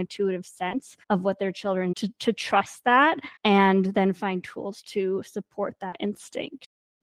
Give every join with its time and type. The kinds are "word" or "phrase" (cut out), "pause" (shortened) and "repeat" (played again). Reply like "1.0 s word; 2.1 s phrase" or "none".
1.0 s pause; 1.9 s phrase; 3.4 s pause